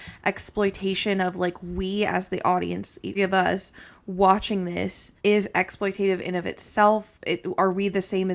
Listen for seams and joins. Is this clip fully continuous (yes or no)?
no